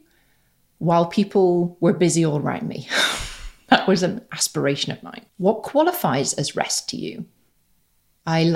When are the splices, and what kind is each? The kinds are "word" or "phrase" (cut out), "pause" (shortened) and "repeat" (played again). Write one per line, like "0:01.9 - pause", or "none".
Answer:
0:05.3 - pause